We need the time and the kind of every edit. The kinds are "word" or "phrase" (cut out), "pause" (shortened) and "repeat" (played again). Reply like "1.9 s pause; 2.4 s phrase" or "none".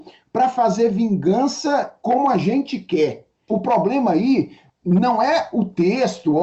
none

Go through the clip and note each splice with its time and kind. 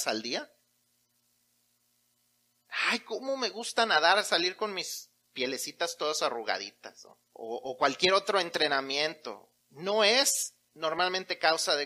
7.3 s pause; 9.6 s pause

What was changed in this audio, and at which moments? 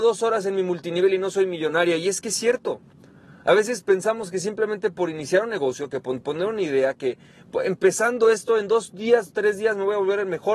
none

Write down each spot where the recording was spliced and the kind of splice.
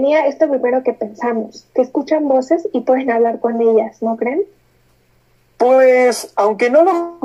none

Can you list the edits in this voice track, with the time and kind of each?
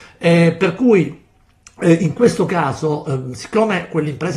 none

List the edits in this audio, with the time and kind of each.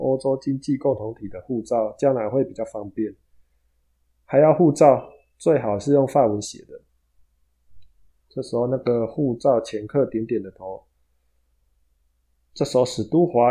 none

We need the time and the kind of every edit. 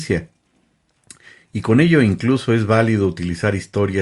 none

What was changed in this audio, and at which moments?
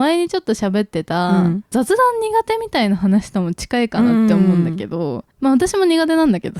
5.3 s pause

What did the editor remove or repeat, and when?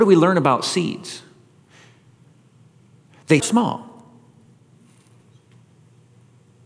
3.4 s word

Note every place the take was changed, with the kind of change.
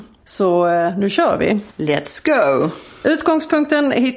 1.7 s pause

